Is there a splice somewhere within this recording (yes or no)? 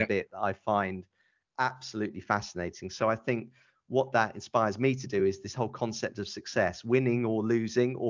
no